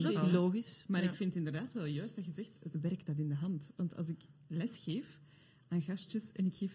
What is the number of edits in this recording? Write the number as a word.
one